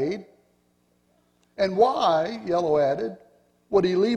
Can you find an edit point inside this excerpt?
no; 0 cuts

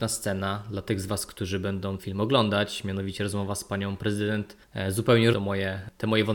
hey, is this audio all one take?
no; 2 cuts; at 2.0 s, 5.3 s

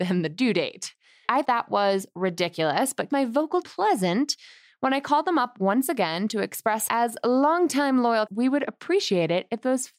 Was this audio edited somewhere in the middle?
yes; 5 cuts; at 1.4 s, 3.1 s, 3.6 s, 6.9 s, 8.3 s

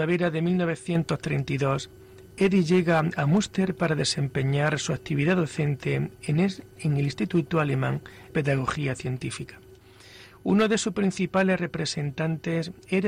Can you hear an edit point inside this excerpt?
yes; 1 cut; at 8.3 s

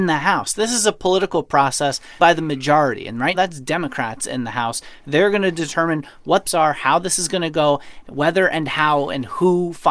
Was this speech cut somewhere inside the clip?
yes; 3 cuts; at 2.2 s, 3.3 s, 6.5 s

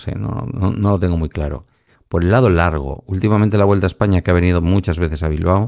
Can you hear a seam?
no; 0 cuts

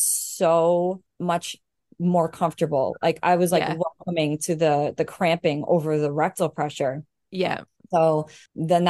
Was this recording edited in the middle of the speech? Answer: no; 0 cuts

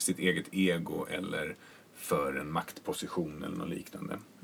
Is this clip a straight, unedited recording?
yes; 0 cuts

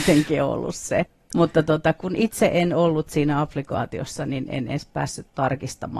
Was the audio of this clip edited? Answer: no; 0 cuts

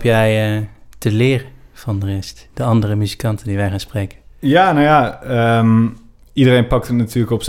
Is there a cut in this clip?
no; 0 cuts

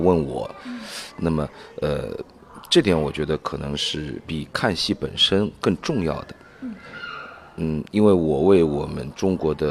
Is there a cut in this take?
no; 0 cuts

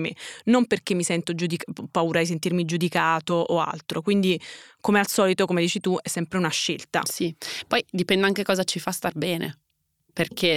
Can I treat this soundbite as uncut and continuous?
yes; 0 cuts

